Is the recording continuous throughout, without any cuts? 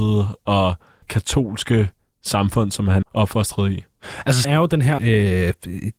no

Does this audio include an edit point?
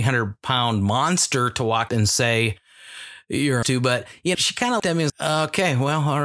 yes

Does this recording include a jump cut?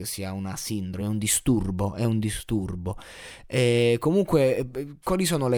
no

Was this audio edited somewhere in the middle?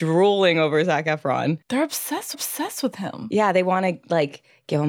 yes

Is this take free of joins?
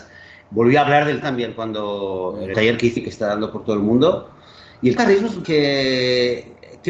no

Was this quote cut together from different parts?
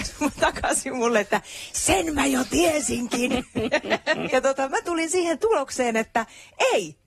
yes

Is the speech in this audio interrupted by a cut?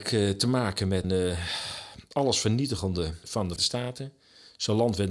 yes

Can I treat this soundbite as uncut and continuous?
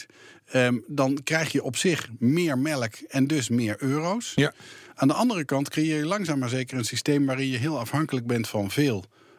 yes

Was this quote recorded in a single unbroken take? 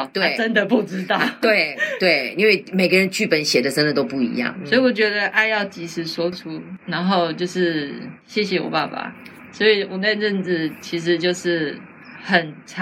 no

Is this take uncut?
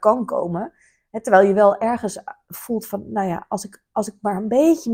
yes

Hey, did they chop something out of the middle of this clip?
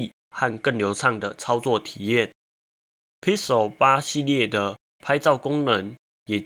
no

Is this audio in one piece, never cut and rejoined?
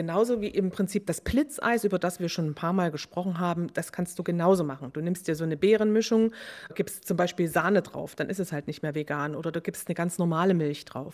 yes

